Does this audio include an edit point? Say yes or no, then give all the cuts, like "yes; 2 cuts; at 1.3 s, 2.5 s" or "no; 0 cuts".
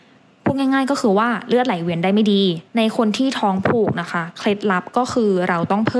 yes; 1 cut; at 2.7 s